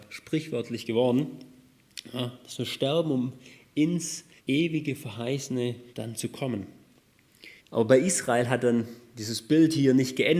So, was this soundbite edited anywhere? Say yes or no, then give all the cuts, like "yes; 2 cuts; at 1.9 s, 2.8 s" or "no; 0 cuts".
yes; 3 cuts; at 4.4 s, 5.9 s, 7.6 s